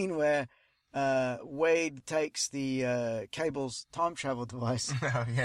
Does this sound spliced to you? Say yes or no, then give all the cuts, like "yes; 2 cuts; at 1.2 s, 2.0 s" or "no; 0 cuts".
no; 0 cuts